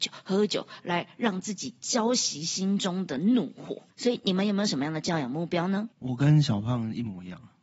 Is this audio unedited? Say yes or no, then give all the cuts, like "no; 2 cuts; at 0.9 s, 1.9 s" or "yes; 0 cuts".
no; 2 cuts; at 3.9 s, 5.9 s